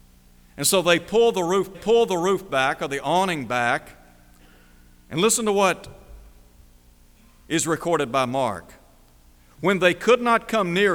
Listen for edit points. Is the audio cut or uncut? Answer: cut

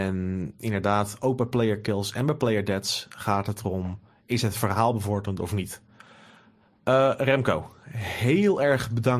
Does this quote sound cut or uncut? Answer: uncut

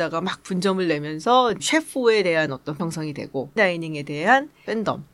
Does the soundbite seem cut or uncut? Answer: cut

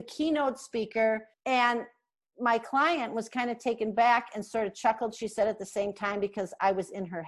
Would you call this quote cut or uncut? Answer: cut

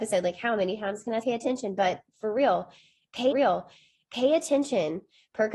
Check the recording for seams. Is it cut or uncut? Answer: cut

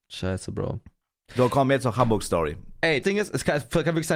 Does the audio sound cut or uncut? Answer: cut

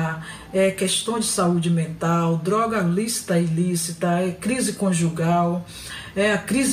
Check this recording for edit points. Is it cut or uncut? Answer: uncut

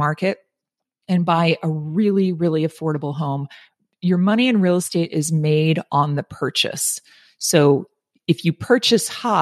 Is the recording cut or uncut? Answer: uncut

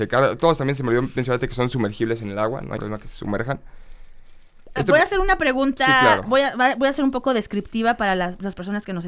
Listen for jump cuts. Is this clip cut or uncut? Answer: cut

